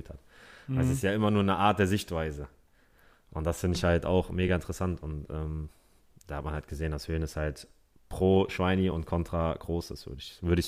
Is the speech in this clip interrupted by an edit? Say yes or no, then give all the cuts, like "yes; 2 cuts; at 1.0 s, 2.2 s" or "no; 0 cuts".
no; 0 cuts